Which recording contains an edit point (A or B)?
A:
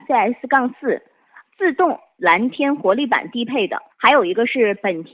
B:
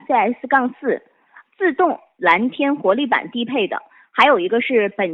A